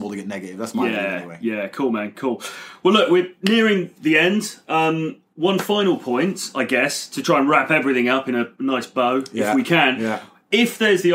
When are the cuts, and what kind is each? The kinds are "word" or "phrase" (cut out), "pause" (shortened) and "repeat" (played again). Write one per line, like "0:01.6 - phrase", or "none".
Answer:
none